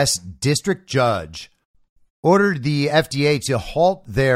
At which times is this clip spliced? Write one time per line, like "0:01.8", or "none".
none